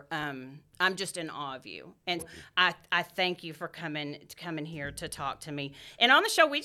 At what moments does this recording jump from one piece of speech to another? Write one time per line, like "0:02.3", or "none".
0:02.2